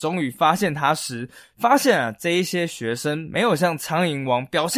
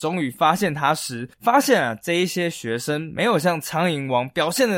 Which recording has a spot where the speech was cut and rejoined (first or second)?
second